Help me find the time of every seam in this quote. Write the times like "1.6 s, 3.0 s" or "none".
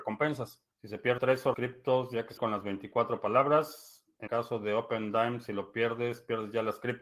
1.2 s, 1.5 s, 2.4 s, 4.3 s